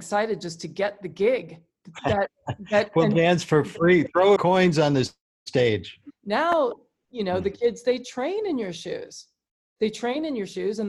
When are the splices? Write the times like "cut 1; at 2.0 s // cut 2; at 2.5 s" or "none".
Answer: cut 1; at 4.4 s